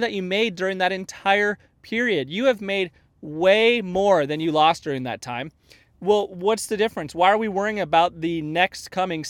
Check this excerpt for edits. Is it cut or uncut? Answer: uncut